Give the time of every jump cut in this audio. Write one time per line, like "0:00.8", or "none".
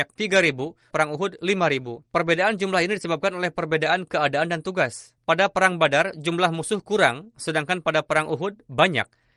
0:00.9
0:02.1
0:05.2